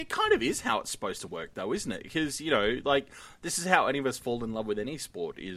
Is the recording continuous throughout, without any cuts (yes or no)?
yes